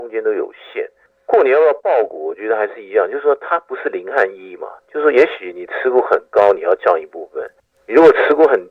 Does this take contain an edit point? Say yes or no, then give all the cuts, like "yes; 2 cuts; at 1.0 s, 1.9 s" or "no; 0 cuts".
no; 0 cuts